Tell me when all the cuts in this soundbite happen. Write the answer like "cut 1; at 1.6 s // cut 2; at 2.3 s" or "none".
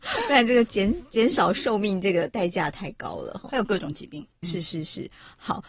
cut 1; at 4.4 s